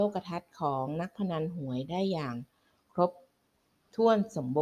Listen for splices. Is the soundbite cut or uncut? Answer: uncut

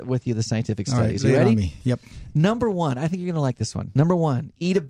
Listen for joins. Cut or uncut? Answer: uncut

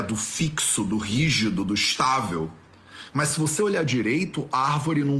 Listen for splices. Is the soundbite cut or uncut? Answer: uncut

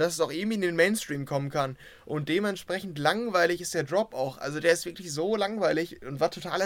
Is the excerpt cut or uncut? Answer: uncut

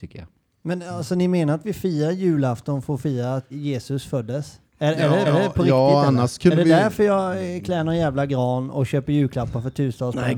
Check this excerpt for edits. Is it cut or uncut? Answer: cut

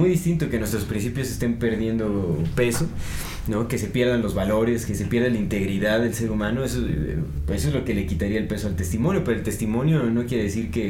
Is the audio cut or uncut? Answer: uncut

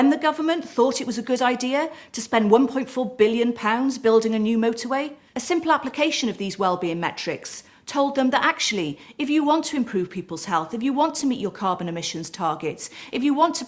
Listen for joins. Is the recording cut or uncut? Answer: uncut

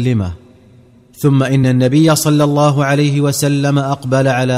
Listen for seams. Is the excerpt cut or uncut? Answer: uncut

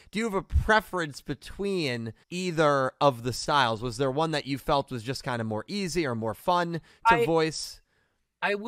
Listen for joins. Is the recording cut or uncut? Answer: cut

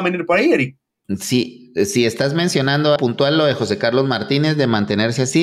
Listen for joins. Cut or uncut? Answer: cut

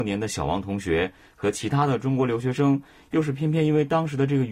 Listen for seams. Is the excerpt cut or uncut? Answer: uncut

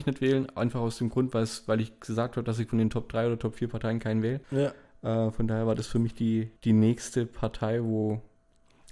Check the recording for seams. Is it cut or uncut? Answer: cut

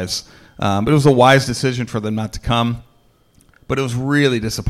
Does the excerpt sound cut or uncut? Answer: uncut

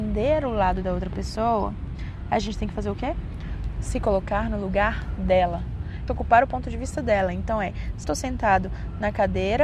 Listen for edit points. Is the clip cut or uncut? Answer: cut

